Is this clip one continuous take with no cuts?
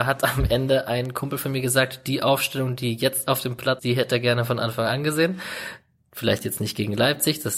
no; 1 cut; at 3.8 s

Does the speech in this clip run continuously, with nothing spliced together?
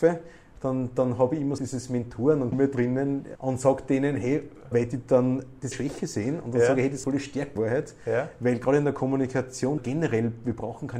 no; 8 cuts; at 1.6 s, 2.5 s, 3.3 s, 4.7 s, 5.7 s, 7.0 s, 7.6 s, 9.8 s

